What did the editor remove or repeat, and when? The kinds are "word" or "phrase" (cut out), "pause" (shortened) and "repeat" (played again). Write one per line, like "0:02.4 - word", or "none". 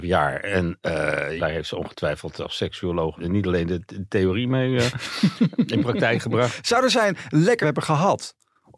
0:01.4 - word
0:03.2 - word
0:07.6 - word